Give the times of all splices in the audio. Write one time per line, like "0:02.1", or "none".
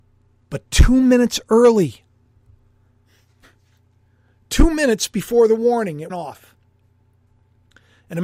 0:06.1

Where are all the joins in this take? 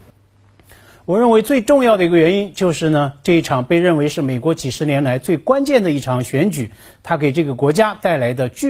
none

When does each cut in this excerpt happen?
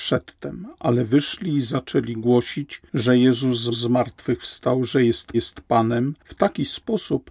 0:03.7
0:05.3

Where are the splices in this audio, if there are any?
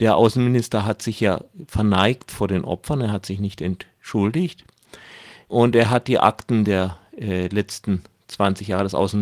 none

